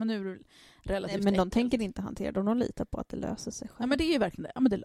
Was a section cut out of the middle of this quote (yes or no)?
no